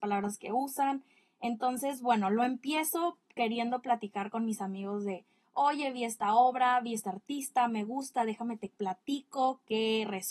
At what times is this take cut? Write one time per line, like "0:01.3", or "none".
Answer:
none